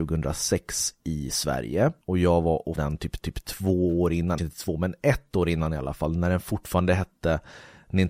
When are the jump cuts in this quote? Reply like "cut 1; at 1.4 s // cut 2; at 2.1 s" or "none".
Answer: cut 1; at 2.0 s // cut 2; at 2.8 s // cut 3; at 3.2 s // cut 4; at 4.4 s

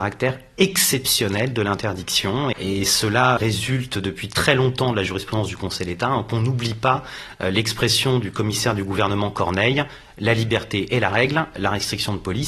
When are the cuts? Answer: cut 1; at 2.5 s // cut 2; at 3.4 s

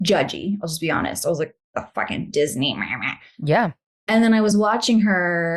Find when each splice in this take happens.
none

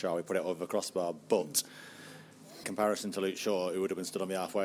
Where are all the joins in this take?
cut 1; at 2.6 s

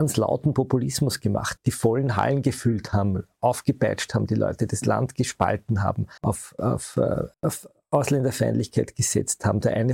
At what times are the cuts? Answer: cut 1; at 1.6 s // cut 2; at 6.2 s // cut 3; at 7.3 s

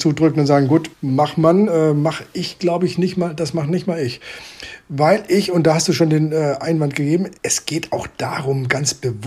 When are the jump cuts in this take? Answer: cut 1; at 0.9 s // cut 2; at 7.4 s

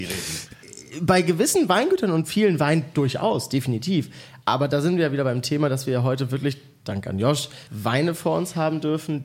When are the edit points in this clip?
cut 1; at 4.4 s // cut 2; at 7.7 s

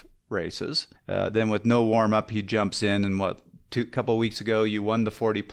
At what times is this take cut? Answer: cut 1; at 1.0 s

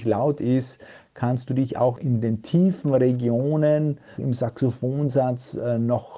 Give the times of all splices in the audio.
cut 1; at 2.0 s // cut 2; at 4.2 s

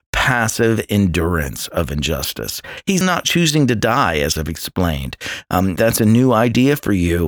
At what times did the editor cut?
cut 1; at 3.0 s // cut 2; at 4.4 s // cut 3; at 5.8 s

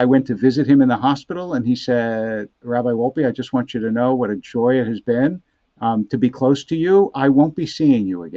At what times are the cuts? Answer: cut 1; at 5.5 s

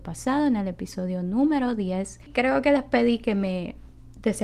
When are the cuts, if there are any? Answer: none

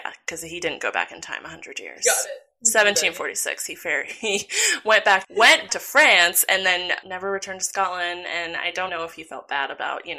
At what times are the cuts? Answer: cut 1; at 5.2 s // cut 2; at 5.7 s // cut 3; at 7.0 s // cut 4; at 8.9 s

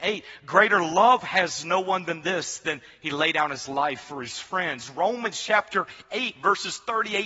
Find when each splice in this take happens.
none

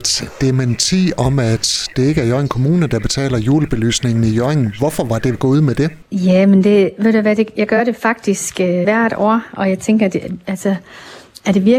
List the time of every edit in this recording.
cut 1; at 5.3 s // cut 2; at 8.8 s

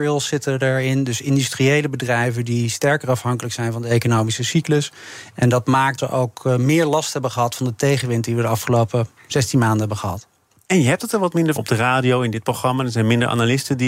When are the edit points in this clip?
cut 1; at 6.0 s // cut 2; at 11.6 s

